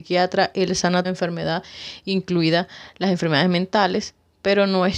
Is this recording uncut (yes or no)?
no